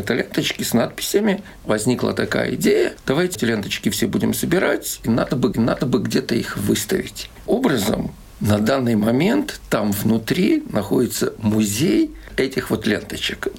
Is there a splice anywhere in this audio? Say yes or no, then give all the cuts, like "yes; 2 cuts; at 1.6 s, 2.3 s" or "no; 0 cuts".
yes; 4 cuts; at 3.3 s, 5.5 s, 7.5 s, 12.3 s